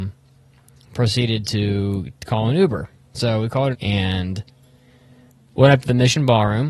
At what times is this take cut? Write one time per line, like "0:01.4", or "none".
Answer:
0:03.7